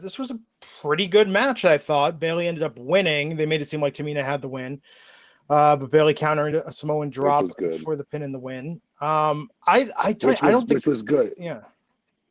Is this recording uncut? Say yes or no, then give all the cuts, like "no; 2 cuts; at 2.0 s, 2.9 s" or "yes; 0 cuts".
yes; 0 cuts